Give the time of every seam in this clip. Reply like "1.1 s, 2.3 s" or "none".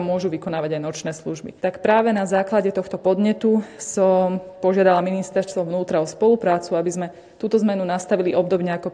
1.6 s